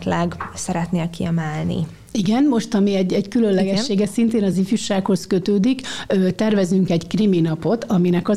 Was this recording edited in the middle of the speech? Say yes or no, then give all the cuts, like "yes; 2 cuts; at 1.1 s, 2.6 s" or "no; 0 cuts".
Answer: no; 0 cuts